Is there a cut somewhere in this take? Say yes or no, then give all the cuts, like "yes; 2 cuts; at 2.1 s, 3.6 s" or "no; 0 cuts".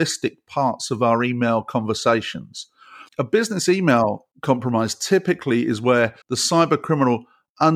yes; 3 cuts; at 3.1 s, 4.3 s, 6.2 s